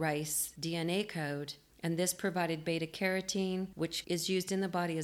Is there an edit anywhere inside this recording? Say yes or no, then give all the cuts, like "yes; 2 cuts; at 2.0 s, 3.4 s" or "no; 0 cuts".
no; 0 cuts